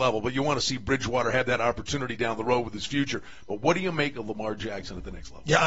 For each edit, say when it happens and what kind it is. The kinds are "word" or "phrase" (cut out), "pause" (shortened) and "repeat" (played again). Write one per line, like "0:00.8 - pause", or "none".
none